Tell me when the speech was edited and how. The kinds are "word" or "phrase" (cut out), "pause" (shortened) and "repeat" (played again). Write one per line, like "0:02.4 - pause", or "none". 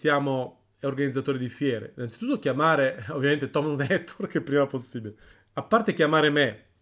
0:05.3 - pause